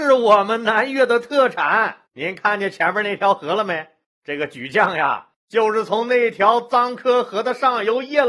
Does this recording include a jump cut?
yes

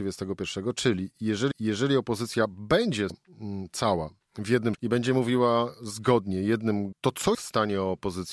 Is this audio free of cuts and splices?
no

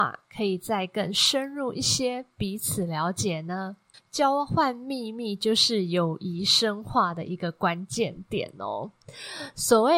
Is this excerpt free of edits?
no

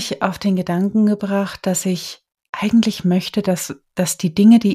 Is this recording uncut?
yes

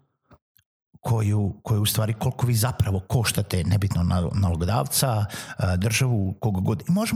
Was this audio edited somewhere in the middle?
no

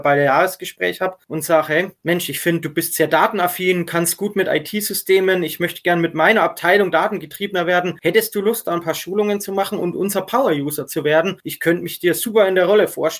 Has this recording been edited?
no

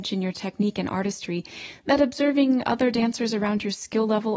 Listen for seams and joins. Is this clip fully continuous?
yes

